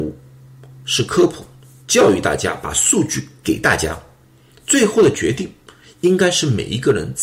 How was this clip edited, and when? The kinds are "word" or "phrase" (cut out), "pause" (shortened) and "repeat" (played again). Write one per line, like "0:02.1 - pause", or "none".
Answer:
none